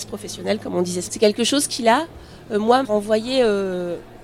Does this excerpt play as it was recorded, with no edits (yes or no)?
no